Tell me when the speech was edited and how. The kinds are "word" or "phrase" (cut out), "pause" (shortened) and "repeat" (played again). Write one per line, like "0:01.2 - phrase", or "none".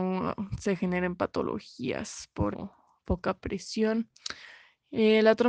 0:02.5 - word

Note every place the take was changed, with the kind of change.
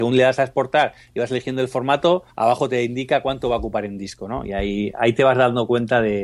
0:02.3 - pause

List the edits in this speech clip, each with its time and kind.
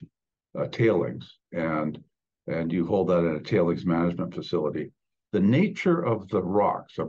none

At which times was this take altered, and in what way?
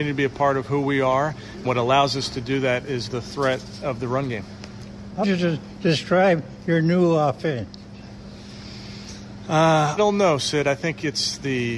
0:01.6 - word
0:05.2 - word
0:10.0 - word

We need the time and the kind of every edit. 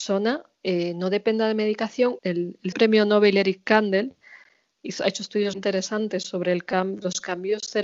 0:02.2 - phrase
0:02.7 - phrase
0:05.5 - word

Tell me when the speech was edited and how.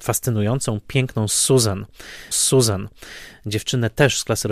0:02.3 - repeat

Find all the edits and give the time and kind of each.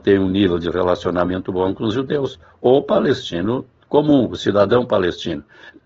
0:01.5 - word

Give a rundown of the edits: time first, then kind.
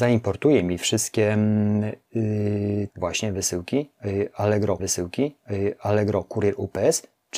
0:02.9 - word
0:04.8 - repeat

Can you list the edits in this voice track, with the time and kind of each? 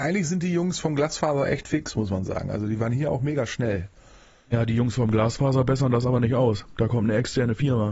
none

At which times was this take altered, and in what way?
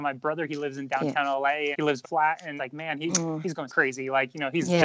0:01.7 - word
0:02.0 - phrase
0:02.6 - word
0:03.7 - word

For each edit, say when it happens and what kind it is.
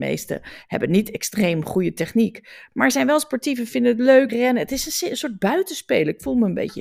0:04.3 - word

